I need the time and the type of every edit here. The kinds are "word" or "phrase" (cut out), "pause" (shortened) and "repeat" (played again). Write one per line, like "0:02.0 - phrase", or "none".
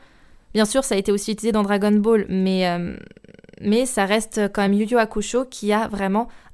none